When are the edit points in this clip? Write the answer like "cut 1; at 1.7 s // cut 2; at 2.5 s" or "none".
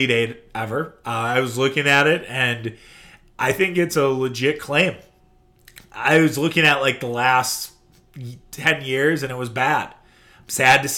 none